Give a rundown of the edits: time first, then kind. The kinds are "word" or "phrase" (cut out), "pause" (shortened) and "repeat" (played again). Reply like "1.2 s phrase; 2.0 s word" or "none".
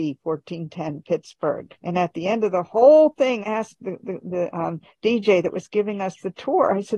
1.8 s pause; 3.4 s word; 4.0 s repeat